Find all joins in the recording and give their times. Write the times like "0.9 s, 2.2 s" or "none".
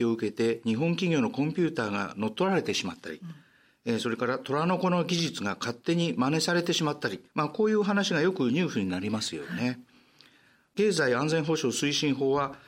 7.3 s